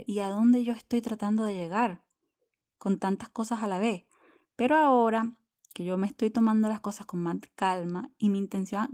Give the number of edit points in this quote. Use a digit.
0